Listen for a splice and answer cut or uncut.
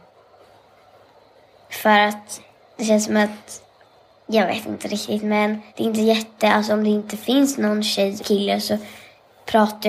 cut